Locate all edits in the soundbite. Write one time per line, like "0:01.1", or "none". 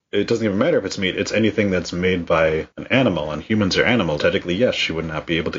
0:02.7
0:04.2

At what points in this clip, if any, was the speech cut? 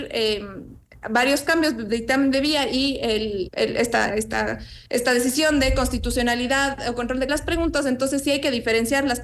0:03.5
0:04.1
0:04.9
0:07.3

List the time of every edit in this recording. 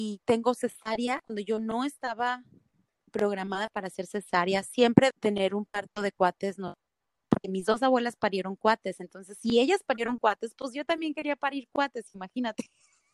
0:05.1

